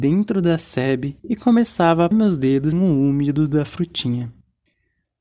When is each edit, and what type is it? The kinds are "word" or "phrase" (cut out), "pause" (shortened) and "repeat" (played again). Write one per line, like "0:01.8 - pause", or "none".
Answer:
0:01.2 - pause
0:02.1 - phrase
0:02.7 - word